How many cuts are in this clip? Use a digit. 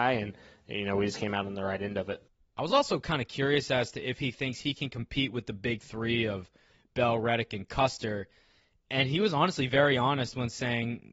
0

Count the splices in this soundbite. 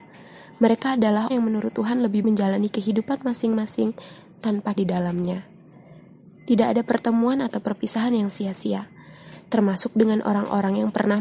3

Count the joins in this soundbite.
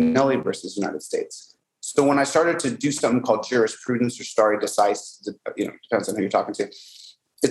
0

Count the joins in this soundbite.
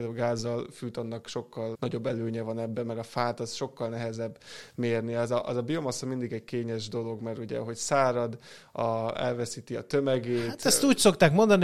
1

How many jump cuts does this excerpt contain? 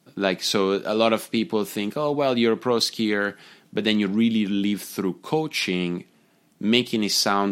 0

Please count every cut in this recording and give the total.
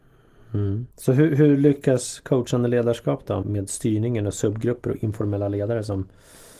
2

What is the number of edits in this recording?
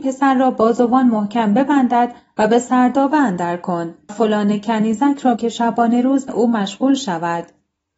3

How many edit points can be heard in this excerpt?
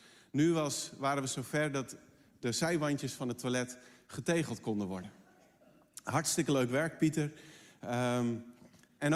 0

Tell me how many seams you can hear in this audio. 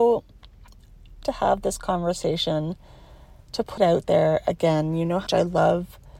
3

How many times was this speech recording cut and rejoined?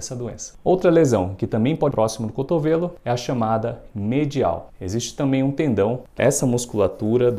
3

